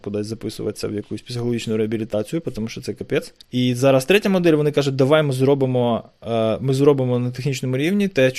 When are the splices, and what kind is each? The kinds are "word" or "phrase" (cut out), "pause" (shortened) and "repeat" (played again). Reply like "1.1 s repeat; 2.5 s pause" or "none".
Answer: 3.4 s pause